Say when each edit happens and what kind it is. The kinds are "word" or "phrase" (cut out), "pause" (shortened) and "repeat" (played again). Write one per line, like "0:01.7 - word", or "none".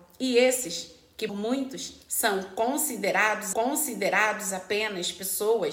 0:01.3 - word
0:02.0 - pause
0:03.5 - repeat

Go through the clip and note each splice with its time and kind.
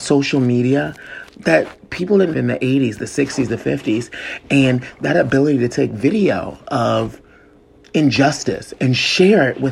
0:01.3 - word
0:02.3 - word

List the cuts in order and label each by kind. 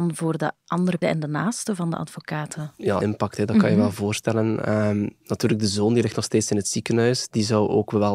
0:01.0 - word
0:03.0 - word

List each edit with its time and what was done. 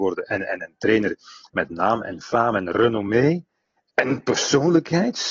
none

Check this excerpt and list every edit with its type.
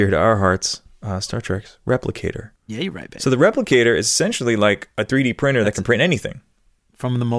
0:02.6 - pause

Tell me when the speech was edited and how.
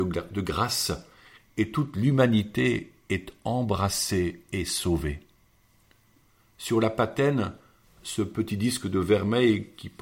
none

